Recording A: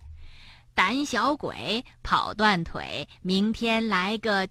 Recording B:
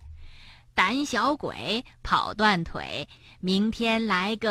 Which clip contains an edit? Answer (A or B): A